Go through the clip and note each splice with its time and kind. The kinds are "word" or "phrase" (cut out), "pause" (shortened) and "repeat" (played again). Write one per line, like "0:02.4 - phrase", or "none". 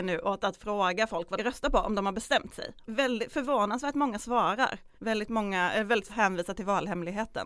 0:01.4 - phrase
0:02.9 - word
0:05.0 - pause
0:06.1 - word

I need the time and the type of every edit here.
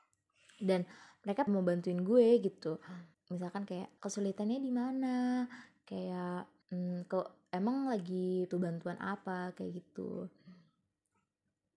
0:01.5 - word
0:03.1 - pause
0:04.0 - pause
0:06.6 - pause
0:08.5 - phrase

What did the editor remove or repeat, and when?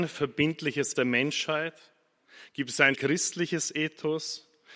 0:00.9 - word
0:02.9 - word

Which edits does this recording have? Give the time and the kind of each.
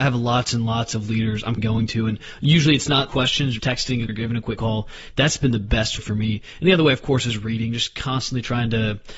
0:01.6 - word
0:03.1 - word
0:03.6 - word
0:04.1 - word
0:04.6 - word
0:06.0 - word

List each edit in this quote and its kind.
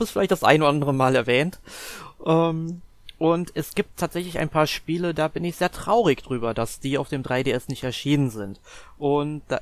none

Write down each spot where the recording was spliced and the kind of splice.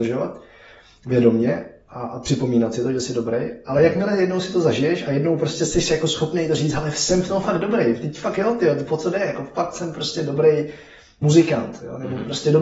none

